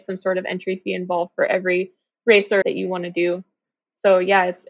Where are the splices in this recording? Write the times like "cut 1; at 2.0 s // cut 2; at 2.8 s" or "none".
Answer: cut 1; at 2.6 s